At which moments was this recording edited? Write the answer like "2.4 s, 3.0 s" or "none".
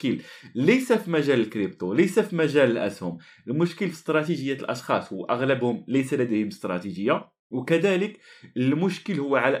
none

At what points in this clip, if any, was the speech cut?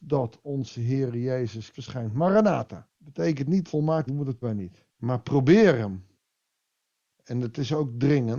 1.7 s, 2.9 s, 3.7 s, 4.1 s, 4.4 s, 4.9 s

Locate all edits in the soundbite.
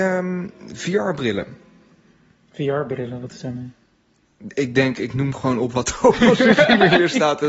none

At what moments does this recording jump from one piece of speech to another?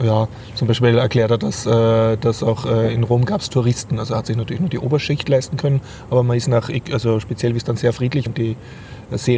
8.3 s

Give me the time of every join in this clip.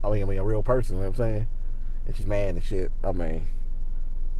2.2 s

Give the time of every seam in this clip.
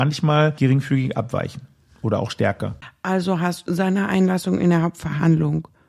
3.7 s

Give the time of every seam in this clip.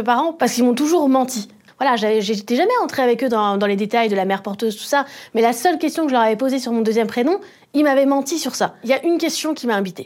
none

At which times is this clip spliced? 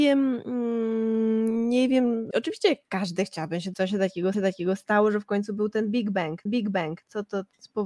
2.3 s, 3.7 s, 4.3 s, 6.5 s

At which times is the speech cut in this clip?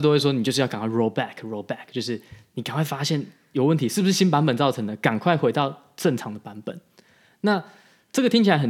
1.1 s

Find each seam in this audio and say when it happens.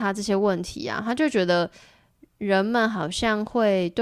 none

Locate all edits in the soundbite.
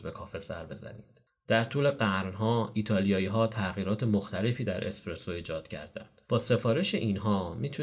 6.2 s

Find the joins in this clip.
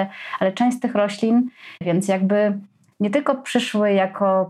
1.8 s

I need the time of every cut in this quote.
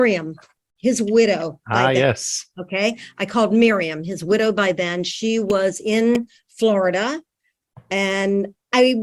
none

